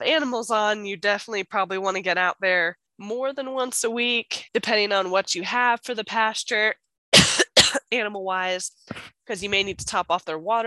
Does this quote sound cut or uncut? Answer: cut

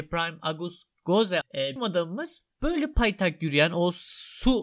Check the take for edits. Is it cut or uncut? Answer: cut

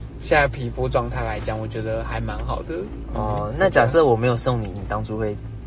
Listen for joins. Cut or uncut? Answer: uncut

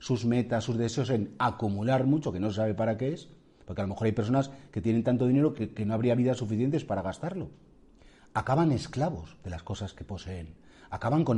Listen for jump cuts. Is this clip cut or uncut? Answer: uncut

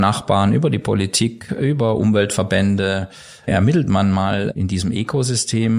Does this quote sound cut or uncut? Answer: uncut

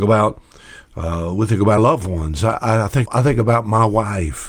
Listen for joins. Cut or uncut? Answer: cut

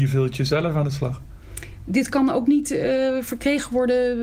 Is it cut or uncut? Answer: uncut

